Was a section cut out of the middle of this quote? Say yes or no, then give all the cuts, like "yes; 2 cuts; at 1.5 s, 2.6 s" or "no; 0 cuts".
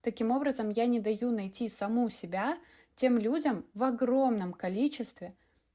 no; 0 cuts